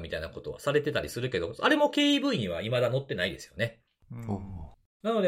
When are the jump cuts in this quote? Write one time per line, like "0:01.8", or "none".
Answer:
none